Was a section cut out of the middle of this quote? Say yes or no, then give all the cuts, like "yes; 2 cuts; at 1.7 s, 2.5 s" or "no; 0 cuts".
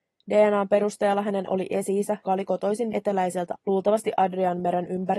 yes; 4 cuts; at 1.5 s, 2.2 s, 2.9 s, 3.5 s